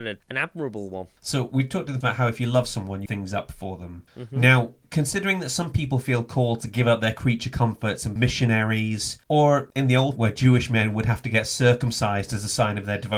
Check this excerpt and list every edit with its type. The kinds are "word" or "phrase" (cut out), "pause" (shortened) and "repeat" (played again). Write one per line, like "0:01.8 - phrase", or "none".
0:02.0 - word
0:03.1 - phrase
0:08.2 - word
0:10.2 - word